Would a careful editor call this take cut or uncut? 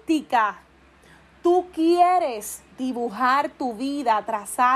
cut